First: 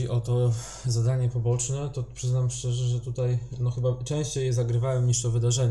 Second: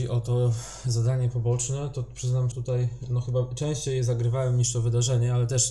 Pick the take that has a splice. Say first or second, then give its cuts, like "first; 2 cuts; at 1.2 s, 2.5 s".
second; 1 cut; at 2.5 s